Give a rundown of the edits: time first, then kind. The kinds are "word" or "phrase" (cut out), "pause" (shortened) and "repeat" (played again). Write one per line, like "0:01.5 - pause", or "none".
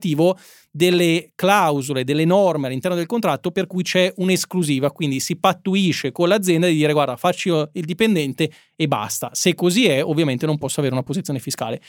none